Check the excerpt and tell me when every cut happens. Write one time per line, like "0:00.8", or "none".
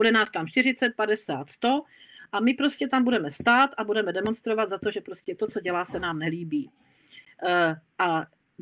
none